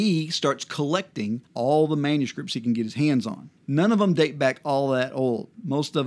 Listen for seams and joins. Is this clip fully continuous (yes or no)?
no